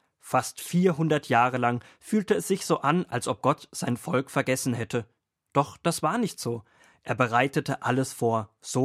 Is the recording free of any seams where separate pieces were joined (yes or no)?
yes